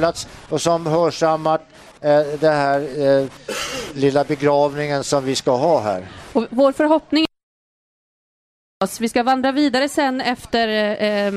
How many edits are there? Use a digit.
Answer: 0